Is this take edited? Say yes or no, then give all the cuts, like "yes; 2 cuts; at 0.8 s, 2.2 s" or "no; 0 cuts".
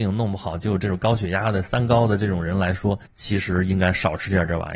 yes; 1 cut; at 3.1 s